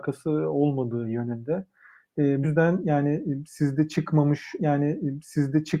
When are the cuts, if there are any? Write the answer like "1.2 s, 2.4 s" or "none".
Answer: 2.4 s, 4.6 s